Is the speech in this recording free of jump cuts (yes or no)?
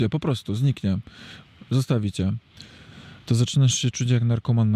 yes